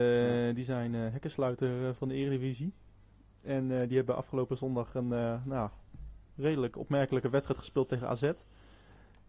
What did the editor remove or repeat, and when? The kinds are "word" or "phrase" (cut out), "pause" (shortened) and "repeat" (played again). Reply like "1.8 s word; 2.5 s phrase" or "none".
1.9 s word